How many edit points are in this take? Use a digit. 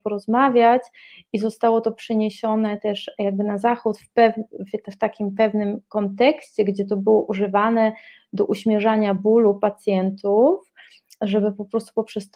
0